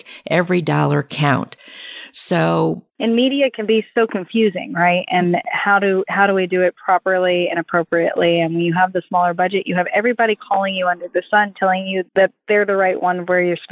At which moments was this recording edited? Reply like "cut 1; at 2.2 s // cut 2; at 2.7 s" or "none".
cut 1; at 2.9 s // cut 2; at 12.1 s